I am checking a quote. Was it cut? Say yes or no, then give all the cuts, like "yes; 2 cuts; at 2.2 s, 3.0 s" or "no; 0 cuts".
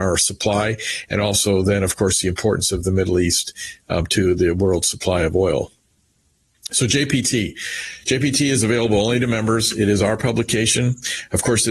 no; 0 cuts